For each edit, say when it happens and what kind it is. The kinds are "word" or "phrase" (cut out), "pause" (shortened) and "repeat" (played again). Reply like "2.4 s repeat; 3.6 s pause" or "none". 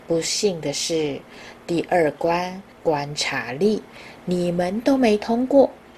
2.7 s pause